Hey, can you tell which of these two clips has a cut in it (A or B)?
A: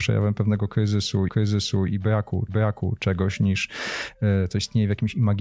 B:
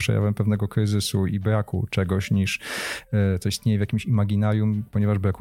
A